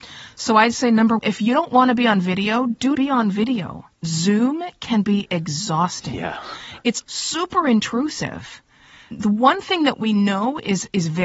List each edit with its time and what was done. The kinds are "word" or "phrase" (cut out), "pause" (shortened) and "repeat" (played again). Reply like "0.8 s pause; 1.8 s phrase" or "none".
1.2 s word; 2.9 s word; 3.9 s pause; 7.0 s word